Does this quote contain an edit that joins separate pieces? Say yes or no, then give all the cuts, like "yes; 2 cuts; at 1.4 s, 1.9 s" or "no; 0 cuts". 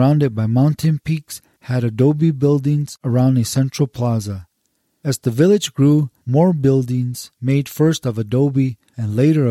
no; 0 cuts